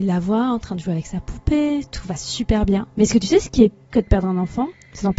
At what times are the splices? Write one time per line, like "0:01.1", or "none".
0:03.9